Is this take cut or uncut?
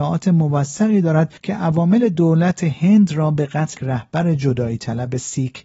cut